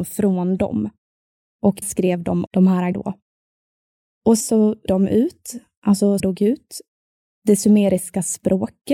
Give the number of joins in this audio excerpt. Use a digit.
6